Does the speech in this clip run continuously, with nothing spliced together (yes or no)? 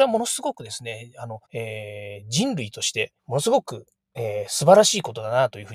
no